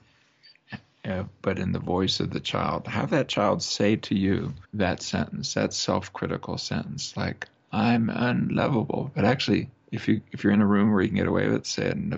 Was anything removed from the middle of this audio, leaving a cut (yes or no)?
yes